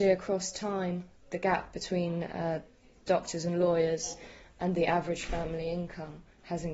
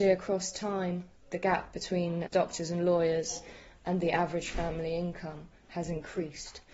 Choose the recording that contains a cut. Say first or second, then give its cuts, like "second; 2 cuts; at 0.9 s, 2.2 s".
second; 1 cut; at 2.3 s